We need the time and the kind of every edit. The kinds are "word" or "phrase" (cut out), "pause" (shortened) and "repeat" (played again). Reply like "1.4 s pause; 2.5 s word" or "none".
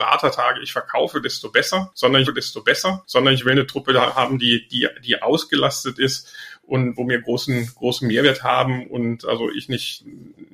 2.2 s repeat